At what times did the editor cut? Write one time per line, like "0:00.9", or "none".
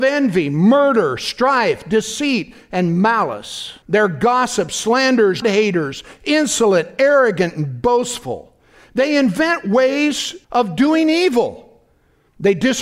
0:03.8
0:05.4
0:10.4

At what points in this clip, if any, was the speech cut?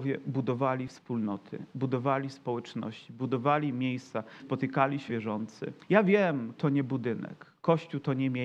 0:04.4
0:05.1
0:05.8
0:06.6

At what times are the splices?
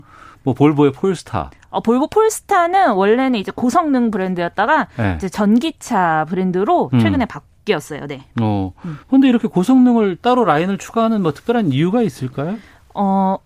0:09.0

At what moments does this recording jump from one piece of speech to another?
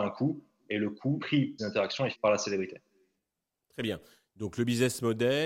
0:01.2
0:01.6
0:02.1

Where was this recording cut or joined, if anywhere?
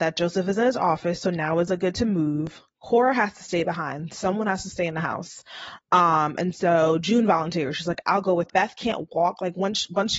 0:01.9
0:08.5

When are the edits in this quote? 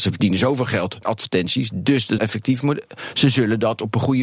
0:01.0
0:02.2

